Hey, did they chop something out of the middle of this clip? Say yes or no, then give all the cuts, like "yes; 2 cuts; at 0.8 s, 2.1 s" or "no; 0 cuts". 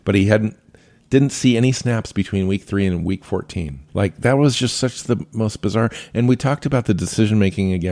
yes; 1 cut; at 3.9 s